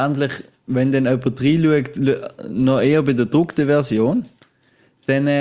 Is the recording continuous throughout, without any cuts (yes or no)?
yes